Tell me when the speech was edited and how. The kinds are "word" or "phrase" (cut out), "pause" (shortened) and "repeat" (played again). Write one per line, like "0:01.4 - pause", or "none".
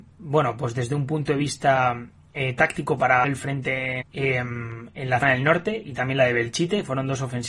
0:03.2 - word
0:04.0 - word
0:05.2 - word